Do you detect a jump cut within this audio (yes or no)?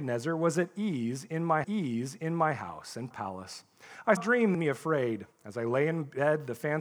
yes